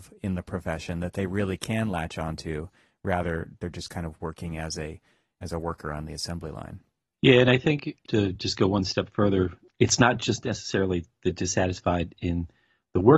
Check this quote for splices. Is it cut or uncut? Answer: uncut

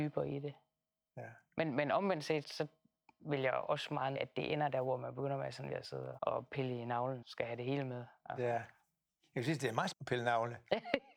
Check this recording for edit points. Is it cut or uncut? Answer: cut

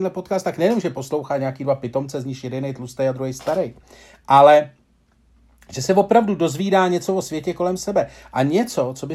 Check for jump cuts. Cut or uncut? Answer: uncut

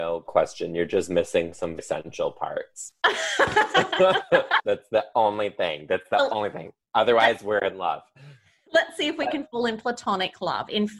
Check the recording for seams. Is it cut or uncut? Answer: cut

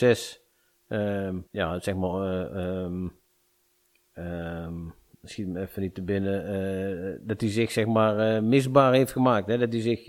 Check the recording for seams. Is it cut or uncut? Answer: cut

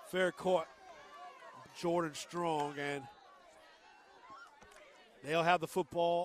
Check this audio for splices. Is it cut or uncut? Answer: cut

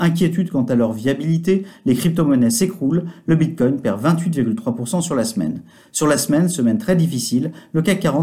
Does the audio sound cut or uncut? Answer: uncut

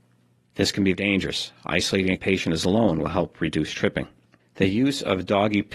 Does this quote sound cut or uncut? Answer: cut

